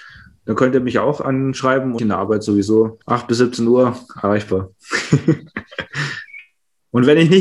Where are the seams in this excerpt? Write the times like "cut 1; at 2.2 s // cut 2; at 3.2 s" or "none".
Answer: cut 1; at 2.0 s // cut 2; at 3.0 s